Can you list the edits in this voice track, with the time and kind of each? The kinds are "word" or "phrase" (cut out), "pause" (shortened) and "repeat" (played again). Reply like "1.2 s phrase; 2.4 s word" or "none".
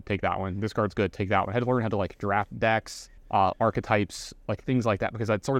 3.2 s pause